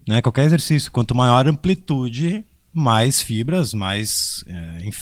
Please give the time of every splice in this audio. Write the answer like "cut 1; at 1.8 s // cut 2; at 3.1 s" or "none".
none